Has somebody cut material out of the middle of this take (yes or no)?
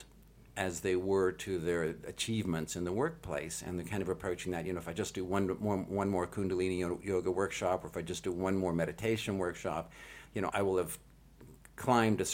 yes